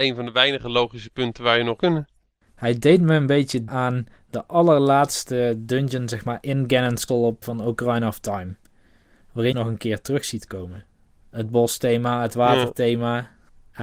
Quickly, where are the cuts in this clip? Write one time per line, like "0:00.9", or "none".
0:01.8
0:03.7
0:07.1
0:07.4
0:09.5